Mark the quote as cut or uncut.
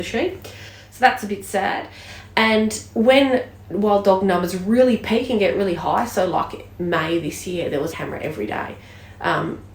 cut